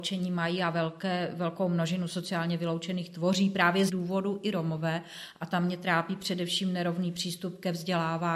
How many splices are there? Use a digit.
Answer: 1